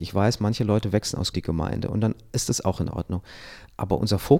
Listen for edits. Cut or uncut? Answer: cut